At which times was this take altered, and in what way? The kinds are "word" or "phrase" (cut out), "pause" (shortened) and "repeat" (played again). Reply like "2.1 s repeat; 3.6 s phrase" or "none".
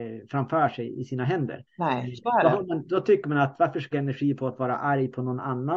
1.7 s pause; 3.9 s phrase